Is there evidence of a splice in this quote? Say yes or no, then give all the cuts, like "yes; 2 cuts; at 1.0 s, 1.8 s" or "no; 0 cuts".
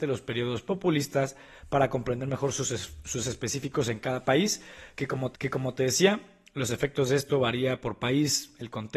yes; 2 cuts; at 3.2 s, 5.3 s